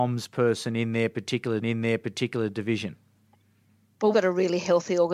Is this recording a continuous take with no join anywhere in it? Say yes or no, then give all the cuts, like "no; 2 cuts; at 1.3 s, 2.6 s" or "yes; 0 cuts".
no; 2 cuts; at 1.6 s, 4.1 s